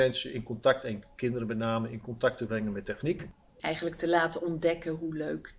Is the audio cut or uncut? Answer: uncut